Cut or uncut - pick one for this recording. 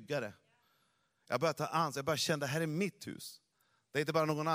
uncut